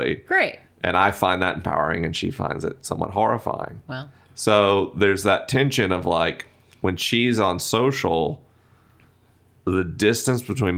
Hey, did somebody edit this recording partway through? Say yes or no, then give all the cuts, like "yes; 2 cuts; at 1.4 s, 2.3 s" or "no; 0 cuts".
no; 0 cuts